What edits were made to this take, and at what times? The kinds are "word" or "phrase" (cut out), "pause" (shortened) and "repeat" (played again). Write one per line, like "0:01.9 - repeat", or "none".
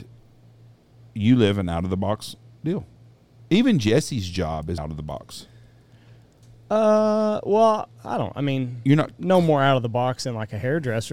0:04.8 - word